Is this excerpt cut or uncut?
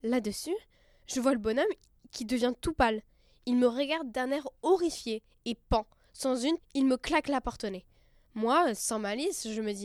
cut